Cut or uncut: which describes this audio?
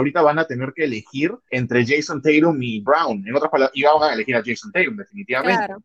cut